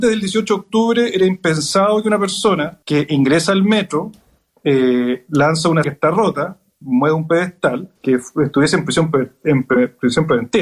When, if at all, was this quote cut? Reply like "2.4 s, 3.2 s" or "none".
2.8 s, 5.8 s, 8.0 s